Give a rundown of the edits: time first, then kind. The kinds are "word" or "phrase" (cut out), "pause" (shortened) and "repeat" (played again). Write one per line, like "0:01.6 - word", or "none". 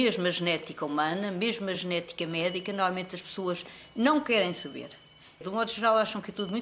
none